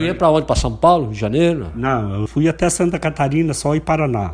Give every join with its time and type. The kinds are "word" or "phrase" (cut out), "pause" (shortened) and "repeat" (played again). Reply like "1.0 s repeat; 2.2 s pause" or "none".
2.3 s word